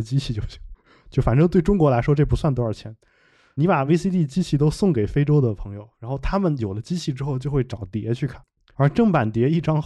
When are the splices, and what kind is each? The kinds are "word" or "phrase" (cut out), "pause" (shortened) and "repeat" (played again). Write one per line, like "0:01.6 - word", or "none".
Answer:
none